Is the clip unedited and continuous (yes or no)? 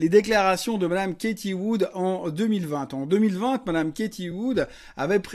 yes